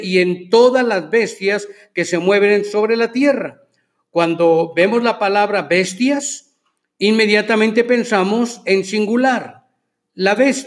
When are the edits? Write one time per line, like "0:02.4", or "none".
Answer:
none